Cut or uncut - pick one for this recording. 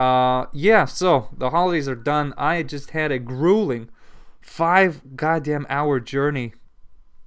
uncut